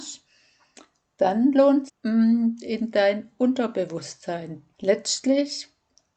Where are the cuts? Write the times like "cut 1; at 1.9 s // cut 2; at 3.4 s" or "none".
cut 1; at 1.9 s // cut 2; at 4.7 s